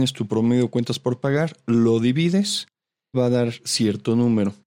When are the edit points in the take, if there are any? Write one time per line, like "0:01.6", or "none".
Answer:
0:03.1